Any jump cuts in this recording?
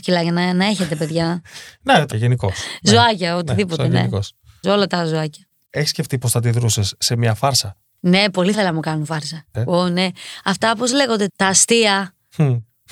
yes; 5 cuts; at 2.1 s, 4.6 s, 8.5 s, 9.5 s, 11.3 s

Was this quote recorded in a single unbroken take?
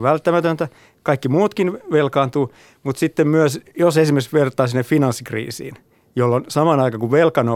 yes; 0 cuts

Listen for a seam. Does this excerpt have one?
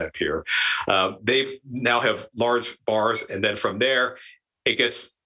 no; 0 cuts

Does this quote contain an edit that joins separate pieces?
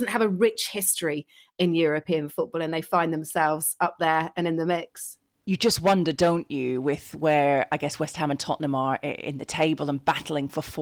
no; 0 cuts

